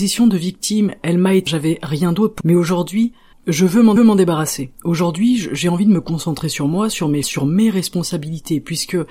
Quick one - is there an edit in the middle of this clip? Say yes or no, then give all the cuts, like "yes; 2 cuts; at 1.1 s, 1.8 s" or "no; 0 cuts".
yes; 5 cuts; at 1.5 s, 2.4 s, 3.3 s, 4.0 s, 7.2 s